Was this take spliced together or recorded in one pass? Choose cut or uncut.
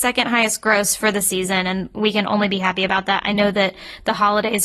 uncut